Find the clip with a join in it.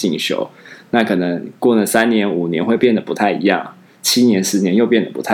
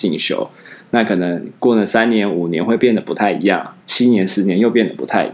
second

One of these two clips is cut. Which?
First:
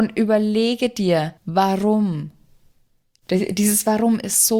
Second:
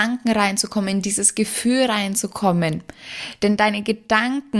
first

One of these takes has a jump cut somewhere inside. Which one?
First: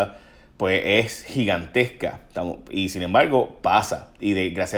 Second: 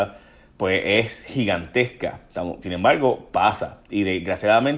second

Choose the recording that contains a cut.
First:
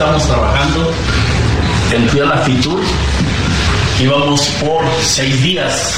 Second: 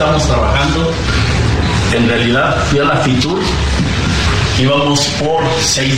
first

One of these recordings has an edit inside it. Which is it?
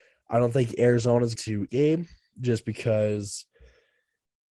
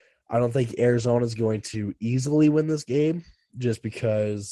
first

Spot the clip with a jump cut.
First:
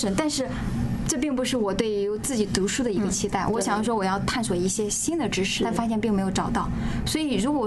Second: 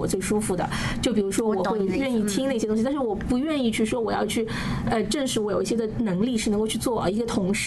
first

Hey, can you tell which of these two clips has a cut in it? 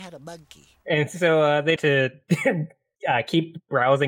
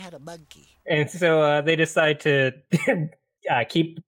first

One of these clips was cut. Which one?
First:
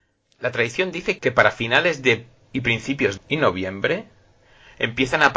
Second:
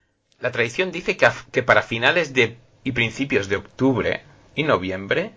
first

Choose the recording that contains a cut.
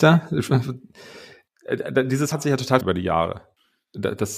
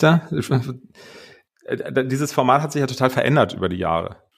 first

